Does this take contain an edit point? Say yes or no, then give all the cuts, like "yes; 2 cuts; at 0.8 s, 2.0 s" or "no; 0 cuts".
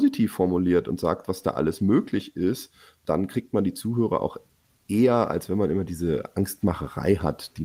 no; 0 cuts